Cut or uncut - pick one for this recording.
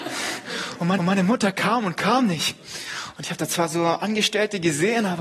cut